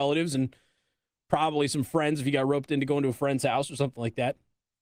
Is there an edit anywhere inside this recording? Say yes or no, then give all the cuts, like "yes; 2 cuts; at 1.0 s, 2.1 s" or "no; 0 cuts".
no; 0 cuts